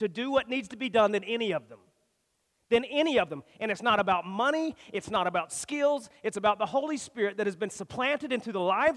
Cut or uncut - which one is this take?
uncut